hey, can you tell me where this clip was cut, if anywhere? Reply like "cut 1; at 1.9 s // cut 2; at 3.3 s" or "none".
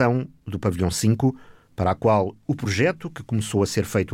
none